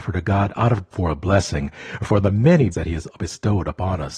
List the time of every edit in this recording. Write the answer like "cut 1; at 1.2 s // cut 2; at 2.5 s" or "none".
cut 1; at 0.9 s // cut 2; at 2.7 s